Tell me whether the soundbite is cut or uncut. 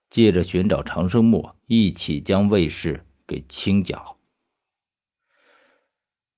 cut